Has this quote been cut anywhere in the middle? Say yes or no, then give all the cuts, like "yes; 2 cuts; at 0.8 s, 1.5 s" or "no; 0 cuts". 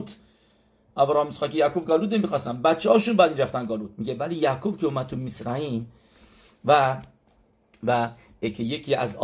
no; 0 cuts